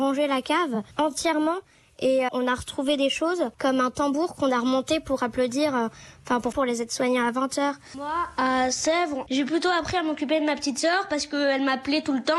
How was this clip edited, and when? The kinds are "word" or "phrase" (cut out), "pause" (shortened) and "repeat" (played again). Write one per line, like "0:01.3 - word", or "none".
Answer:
0:00.9 - pause
0:02.3 - word
0:03.5 - pause
0:06.5 - phrase